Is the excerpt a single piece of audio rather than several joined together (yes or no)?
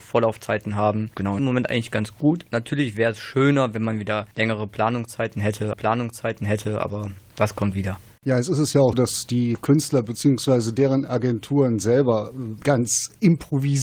no